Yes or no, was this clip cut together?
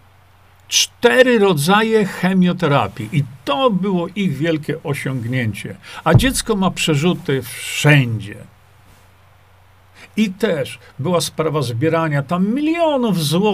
no